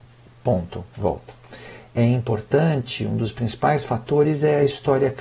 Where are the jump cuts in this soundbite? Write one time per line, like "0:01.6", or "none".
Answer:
none